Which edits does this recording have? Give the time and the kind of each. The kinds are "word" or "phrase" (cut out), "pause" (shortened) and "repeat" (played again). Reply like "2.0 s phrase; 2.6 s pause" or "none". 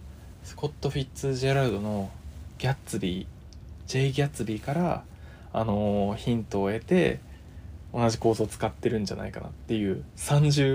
none